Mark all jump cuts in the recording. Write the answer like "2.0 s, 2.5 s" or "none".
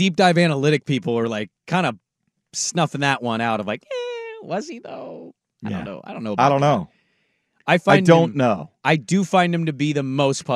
none